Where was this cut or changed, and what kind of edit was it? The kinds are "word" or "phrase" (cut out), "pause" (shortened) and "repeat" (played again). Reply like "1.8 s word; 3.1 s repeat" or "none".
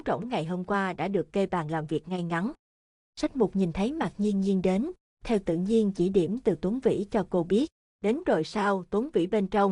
none